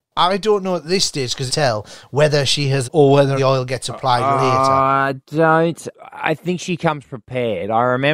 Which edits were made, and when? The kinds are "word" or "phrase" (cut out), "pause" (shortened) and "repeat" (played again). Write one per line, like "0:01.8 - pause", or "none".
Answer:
0:01.5 - phrase
0:02.8 - phrase
0:03.4 - phrase